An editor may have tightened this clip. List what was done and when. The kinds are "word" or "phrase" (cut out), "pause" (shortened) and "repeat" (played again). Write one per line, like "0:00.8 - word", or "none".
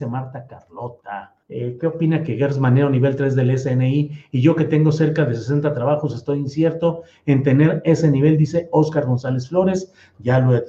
0:01.4 - pause